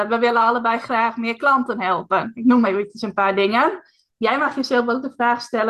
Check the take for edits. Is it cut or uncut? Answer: uncut